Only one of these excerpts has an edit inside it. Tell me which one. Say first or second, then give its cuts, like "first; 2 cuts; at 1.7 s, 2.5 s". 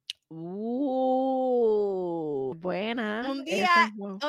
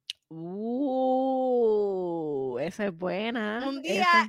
first; 1 cut; at 2.5 s